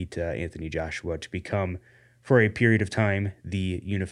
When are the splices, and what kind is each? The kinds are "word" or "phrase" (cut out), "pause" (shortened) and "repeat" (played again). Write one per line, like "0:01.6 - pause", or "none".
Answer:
none